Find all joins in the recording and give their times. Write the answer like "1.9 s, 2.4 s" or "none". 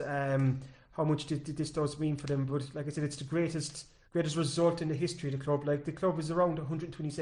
4.0 s